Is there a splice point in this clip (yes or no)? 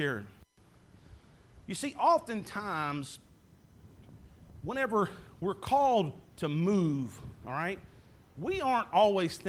no